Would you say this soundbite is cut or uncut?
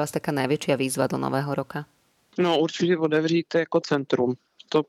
uncut